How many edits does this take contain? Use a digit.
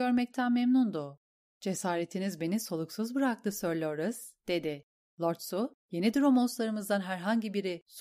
1